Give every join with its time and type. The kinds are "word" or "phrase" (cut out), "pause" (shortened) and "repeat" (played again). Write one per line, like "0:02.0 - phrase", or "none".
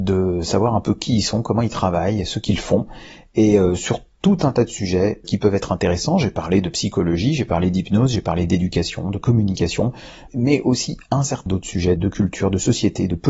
0:05.2 - word
0:10.3 - word
0:11.5 - word
0:12.0 - word